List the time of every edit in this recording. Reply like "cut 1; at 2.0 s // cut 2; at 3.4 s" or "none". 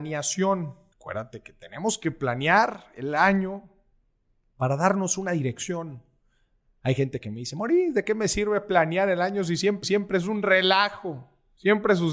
cut 1; at 0.9 s // cut 2; at 9.8 s